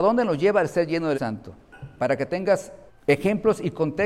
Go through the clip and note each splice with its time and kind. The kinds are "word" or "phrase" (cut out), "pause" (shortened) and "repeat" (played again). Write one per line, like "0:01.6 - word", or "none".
0:01.1 - word
0:02.9 - pause